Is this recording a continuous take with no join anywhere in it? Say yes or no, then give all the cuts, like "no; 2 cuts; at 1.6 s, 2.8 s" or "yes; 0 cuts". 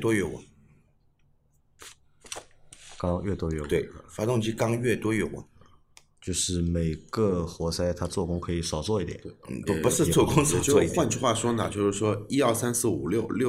no; 1 cut; at 9.7 s